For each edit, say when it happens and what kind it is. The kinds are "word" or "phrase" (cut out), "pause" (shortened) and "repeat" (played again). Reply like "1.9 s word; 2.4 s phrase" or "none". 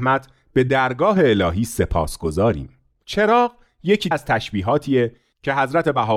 4.1 s word